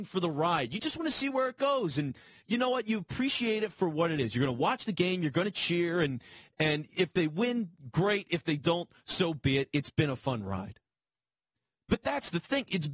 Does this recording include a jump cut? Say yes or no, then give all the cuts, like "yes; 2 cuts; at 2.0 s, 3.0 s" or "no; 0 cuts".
no; 0 cuts